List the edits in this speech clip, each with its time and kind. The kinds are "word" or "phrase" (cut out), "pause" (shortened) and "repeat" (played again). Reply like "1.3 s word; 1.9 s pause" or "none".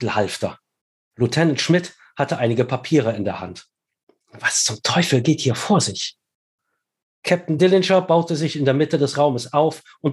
none